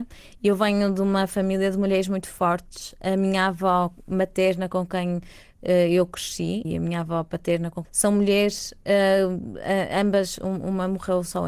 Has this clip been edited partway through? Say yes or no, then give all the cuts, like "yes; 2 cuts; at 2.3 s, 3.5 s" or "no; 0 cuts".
yes; 2 cuts; at 6.6 s, 7.8 s